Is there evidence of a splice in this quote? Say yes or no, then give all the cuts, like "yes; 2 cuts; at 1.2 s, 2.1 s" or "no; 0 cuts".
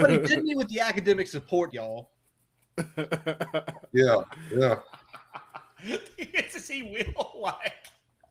yes; 1 cut; at 1.7 s